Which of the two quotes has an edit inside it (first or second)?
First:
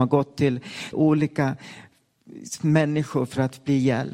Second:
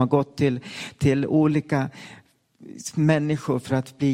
first